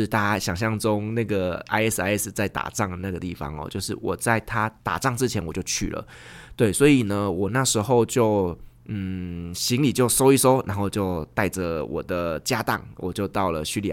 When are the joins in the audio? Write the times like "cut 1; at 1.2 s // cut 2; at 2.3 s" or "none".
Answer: cut 1; at 4.8 s